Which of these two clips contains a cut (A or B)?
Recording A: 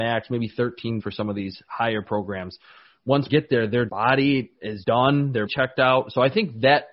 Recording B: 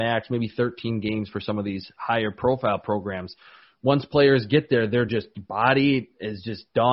A